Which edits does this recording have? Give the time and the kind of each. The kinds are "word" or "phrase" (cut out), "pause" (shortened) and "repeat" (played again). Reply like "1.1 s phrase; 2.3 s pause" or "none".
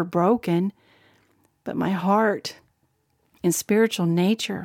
none